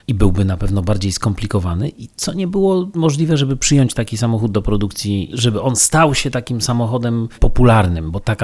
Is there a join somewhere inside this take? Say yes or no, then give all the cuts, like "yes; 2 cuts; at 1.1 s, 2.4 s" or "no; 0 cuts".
no; 0 cuts